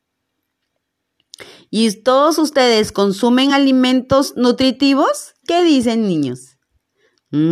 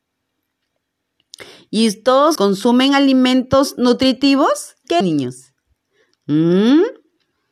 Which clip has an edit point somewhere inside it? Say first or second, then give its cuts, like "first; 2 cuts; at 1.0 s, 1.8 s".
second; 2 cuts; at 2.4 s, 5.0 s